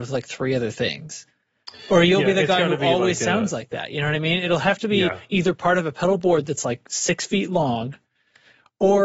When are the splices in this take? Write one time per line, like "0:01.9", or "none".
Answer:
none

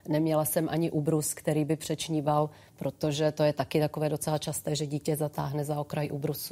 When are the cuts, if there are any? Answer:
none

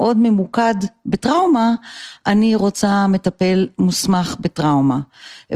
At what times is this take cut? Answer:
none

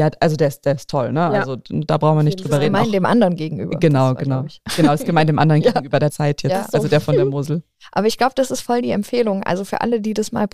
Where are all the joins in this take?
0:06.1

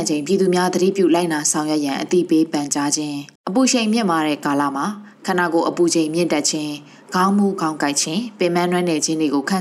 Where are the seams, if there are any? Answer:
0:03.4

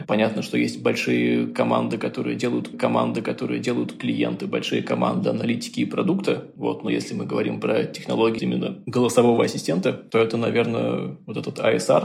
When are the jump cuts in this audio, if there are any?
0:02.7
0:08.4

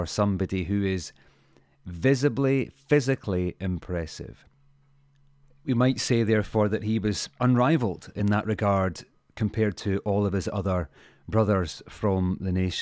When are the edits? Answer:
none

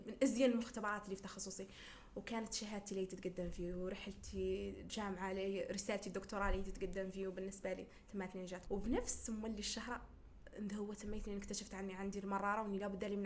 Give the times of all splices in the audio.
0:08.7

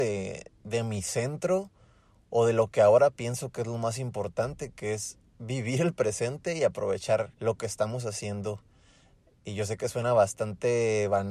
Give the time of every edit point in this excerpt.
0:05.3
0:07.3

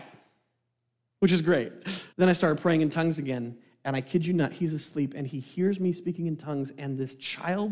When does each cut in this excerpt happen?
0:02.1

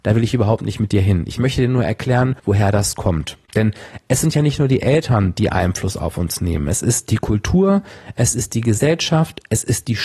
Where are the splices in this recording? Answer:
0:02.4
0:03.5

